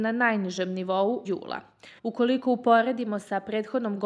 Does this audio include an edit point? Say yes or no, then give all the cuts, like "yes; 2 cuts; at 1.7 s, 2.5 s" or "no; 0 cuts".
yes; 2 cuts; at 1.2 s, 2.0 s